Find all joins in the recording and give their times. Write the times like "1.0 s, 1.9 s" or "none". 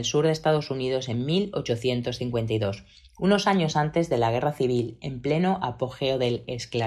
none